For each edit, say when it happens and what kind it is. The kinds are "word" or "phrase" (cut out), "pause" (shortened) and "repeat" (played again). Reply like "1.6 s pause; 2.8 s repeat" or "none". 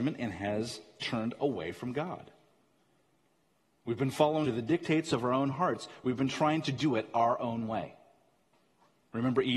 4.4 s word